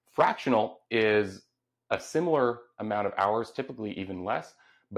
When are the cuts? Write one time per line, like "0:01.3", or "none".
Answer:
none